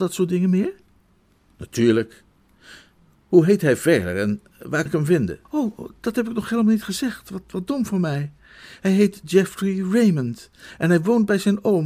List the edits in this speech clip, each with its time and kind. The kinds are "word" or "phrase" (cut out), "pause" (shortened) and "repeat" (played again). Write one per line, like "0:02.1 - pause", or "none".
0:04.9 - word
0:05.4 - pause